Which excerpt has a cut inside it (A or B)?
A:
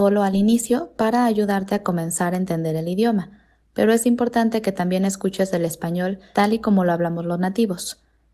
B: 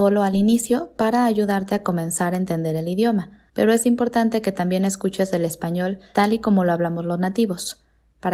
B